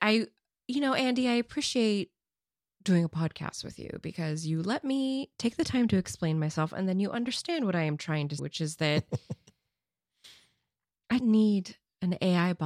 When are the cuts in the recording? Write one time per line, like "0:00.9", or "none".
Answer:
0:08.4
0:11.2